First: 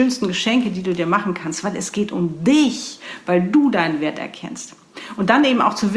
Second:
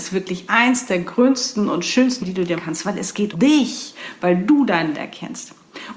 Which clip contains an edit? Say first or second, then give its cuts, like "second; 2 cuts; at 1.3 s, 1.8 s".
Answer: second; 4 cuts; at 2.2 s, 2.6 s, 3.3 s, 4.9 s